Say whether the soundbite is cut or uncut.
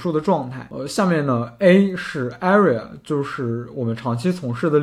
uncut